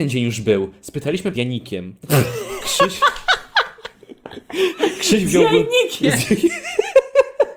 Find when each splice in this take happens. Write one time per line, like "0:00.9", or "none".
0:01.3